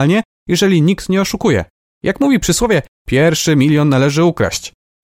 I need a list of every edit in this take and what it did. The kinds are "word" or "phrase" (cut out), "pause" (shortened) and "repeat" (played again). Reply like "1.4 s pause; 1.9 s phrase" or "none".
none